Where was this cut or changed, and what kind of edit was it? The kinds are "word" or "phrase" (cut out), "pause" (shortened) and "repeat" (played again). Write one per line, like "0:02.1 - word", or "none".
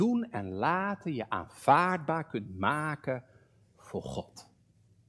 none